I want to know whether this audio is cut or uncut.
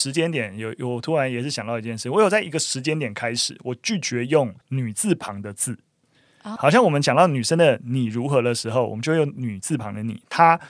cut